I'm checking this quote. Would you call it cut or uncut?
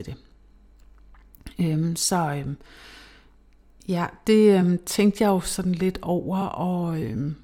uncut